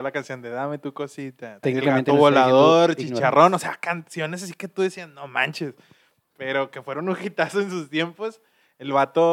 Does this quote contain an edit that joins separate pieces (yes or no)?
yes